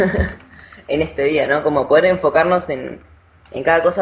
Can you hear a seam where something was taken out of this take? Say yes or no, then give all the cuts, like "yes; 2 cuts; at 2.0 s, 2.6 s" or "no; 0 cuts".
no; 0 cuts